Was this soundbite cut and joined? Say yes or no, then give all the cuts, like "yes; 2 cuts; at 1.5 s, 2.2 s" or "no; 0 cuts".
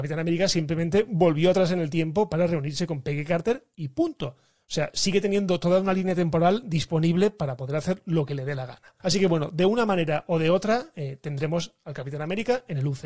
yes; 1 cut; at 9.0 s